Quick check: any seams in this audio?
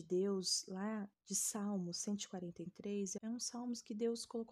yes; 1 cut; at 3.2 s

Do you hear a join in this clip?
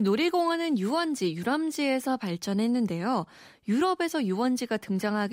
no; 0 cuts

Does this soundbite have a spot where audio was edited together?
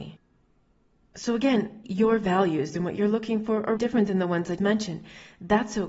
yes; 3 cuts; at 1.8 s, 3.8 s, 4.6 s

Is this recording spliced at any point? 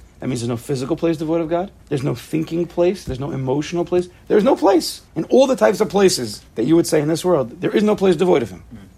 yes; 3 cuts; at 1.8 s, 5.1 s, 6.5 s

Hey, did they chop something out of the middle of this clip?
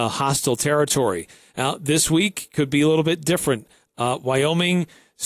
no; 0 cuts

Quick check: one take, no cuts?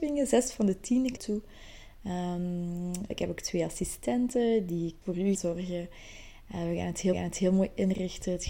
no; 5 cuts; at 1.2 s, 3.1 s, 5.0 s, 5.3 s, 7.1 s

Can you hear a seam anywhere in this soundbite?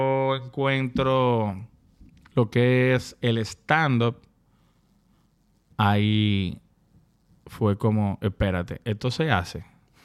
no; 0 cuts

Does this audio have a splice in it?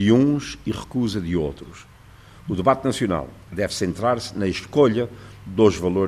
no; 0 cuts

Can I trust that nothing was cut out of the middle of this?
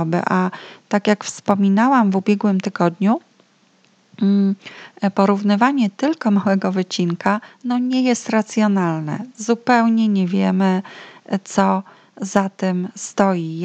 yes; 0 cuts

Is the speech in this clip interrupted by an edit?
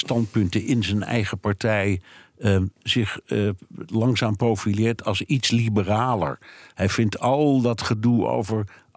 no; 0 cuts

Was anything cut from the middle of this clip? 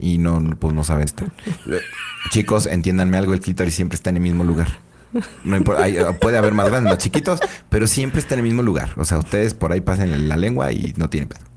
yes; 1 cut; at 1.1 s

